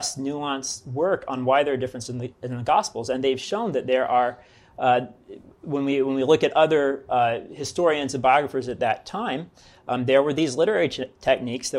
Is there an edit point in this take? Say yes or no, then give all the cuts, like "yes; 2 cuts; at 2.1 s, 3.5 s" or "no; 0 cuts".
no; 0 cuts